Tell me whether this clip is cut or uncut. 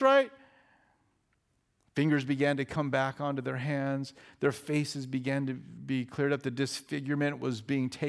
uncut